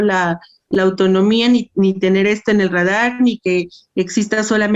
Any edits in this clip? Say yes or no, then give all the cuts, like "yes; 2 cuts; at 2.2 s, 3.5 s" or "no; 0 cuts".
no; 0 cuts